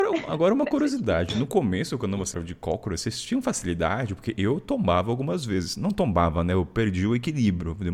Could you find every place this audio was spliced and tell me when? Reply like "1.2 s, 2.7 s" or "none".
2.3 s